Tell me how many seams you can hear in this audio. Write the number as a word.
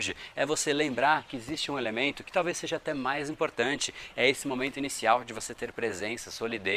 zero